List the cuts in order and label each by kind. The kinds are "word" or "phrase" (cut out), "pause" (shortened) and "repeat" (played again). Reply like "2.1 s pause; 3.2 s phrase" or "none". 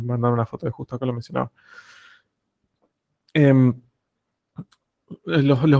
none